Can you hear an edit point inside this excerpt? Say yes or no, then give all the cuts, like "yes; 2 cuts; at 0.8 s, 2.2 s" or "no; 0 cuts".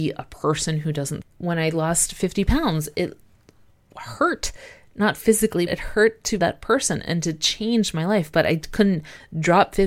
yes; 3 cuts; at 1.2 s, 5.7 s, 6.4 s